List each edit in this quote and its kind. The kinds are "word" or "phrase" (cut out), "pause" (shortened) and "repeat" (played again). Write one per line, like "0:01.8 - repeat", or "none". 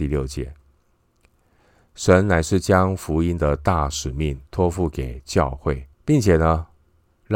0:04.5 - pause
0:05.9 - pause